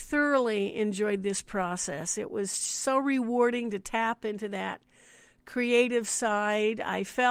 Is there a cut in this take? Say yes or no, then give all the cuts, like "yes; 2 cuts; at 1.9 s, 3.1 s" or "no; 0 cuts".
no; 0 cuts